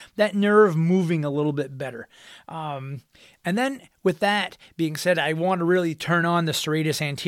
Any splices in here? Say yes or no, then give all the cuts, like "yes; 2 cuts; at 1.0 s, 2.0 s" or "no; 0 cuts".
no; 0 cuts